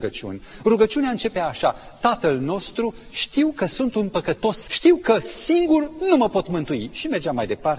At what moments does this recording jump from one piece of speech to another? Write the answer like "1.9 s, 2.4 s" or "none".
4.7 s